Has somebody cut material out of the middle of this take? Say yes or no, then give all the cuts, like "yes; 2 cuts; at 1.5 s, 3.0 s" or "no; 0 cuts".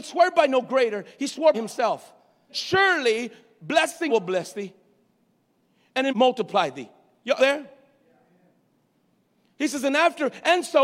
yes; 5 cuts; at 1.5 s, 2.5 s, 4.1 s, 6.1 s, 7.4 s